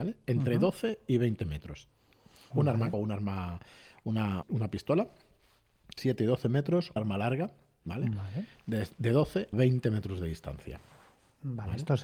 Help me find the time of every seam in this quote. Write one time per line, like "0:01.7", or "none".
0:02.5
0:02.9
0:04.4
0:06.0
0:07.0
0:09.5